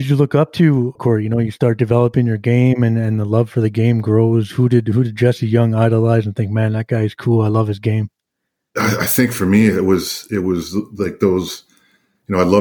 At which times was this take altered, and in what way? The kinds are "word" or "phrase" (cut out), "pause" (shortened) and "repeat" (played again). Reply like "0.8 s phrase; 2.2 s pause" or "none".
1.0 s phrase